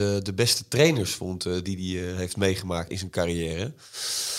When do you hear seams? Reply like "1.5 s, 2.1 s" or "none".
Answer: 2.9 s